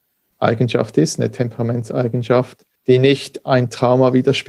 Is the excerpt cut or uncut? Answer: cut